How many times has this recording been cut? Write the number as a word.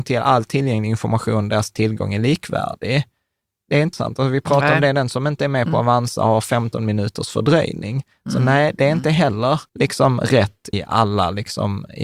three